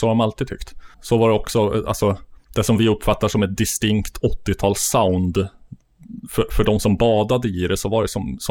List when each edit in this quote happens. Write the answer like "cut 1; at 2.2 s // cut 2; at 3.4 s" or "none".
cut 1; at 0.9 s // cut 2; at 2.4 s